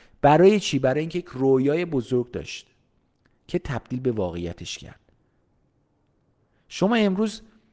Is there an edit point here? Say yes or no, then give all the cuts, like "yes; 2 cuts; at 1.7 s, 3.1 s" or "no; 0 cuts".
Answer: no; 0 cuts